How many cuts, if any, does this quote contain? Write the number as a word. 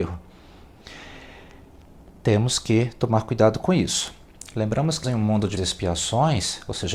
two